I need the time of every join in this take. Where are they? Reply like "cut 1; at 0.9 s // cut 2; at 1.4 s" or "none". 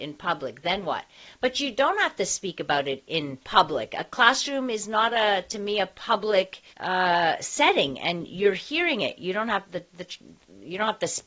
cut 1; at 3.4 s // cut 2; at 6.7 s